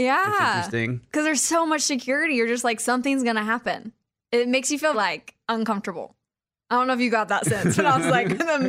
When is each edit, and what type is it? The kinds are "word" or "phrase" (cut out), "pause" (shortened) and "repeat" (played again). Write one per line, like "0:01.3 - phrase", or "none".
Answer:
0:04.9 - word